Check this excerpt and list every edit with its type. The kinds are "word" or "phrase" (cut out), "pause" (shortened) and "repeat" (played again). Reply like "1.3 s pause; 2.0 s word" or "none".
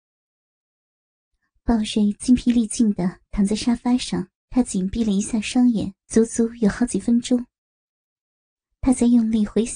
4.4 s pause; 6.0 s pause

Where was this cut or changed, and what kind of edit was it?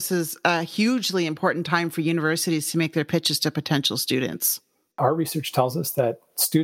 none

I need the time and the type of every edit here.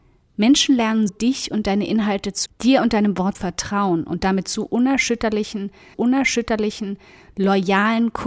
1.1 s word; 2.5 s word; 3.3 s word; 5.9 s repeat

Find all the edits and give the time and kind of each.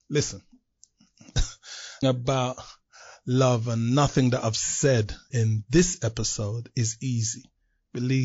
2.0 s word; 5.3 s word

